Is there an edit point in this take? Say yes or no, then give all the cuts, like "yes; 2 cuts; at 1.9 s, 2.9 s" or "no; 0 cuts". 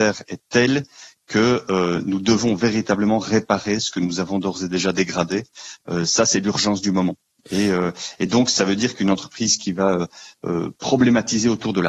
no; 0 cuts